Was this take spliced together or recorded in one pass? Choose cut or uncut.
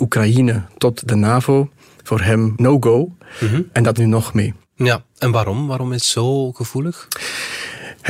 cut